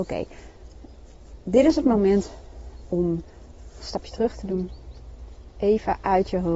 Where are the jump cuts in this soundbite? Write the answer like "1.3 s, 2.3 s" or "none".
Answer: none